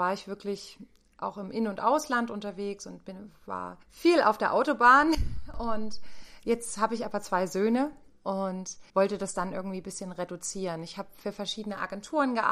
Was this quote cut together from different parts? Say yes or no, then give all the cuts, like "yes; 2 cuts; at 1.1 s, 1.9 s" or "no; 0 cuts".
yes; 2 cuts; at 3.8 s, 8.9 s